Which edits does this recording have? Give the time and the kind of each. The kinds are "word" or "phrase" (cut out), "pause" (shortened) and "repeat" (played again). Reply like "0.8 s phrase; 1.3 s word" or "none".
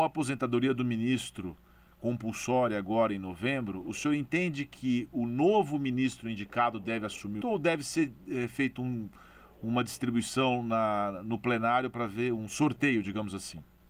7.4 s word